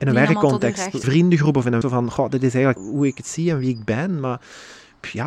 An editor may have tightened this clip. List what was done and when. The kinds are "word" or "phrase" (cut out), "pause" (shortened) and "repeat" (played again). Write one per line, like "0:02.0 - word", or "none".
0:01.0 - phrase
0:01.8 - word
0:02.8 - phrase